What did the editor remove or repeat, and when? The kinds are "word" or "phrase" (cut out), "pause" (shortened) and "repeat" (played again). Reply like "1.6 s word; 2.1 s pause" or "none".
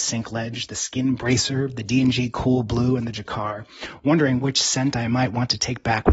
none